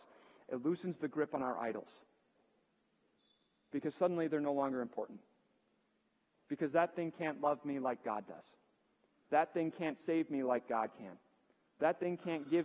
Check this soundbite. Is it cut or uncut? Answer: uncut